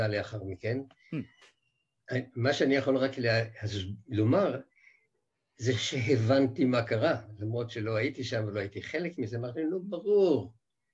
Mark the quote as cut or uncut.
uncut